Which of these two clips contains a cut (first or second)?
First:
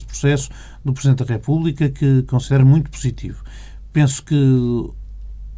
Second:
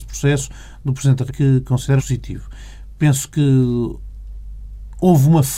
second